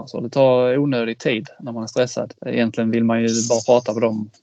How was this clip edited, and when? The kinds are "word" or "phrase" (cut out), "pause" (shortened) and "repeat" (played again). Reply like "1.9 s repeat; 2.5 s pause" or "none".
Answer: 2.4 s pause